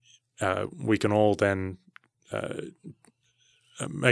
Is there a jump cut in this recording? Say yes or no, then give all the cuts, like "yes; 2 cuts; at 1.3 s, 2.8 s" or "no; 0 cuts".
no; 0 cuts